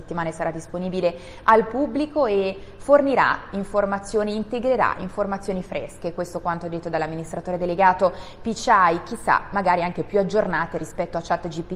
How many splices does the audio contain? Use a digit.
0